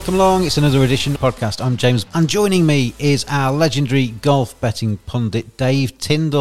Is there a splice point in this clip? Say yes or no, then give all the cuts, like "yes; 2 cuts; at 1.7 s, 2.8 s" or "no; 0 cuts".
yes; 2 cuts; at 1.2 s, 2.1 s